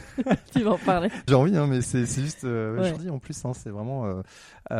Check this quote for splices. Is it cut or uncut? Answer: cut